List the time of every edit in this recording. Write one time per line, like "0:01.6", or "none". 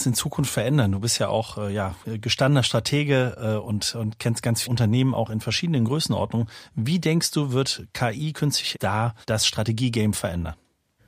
0:04.6
0:08.7
0:09.2